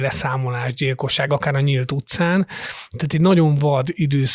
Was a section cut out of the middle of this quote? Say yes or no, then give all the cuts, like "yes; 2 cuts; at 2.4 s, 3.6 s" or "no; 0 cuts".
no; 0 cuts